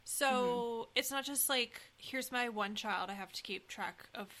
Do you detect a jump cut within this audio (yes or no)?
yes